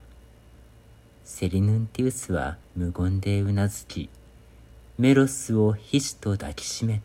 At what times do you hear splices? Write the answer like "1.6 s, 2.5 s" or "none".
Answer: 2.6 s